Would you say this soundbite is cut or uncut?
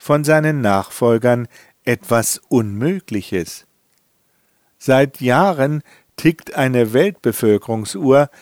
uncut